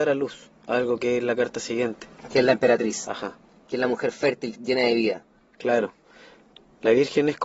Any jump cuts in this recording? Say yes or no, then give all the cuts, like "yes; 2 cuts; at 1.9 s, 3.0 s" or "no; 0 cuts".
no; 0 cuts